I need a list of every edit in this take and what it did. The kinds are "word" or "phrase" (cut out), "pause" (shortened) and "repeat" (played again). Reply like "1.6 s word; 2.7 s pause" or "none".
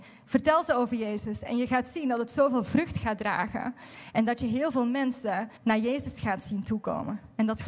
5.6 s pause